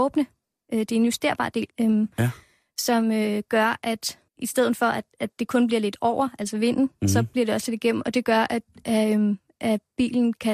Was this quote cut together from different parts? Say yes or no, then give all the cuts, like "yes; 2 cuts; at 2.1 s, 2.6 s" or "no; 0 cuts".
yes; 3 cuts; at 1.7 s, 4.3 s, 5.1 s